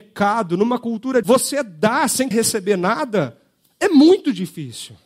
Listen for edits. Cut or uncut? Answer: cut